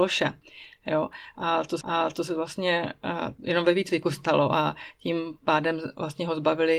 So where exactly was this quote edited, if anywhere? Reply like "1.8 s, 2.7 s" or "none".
1.8 s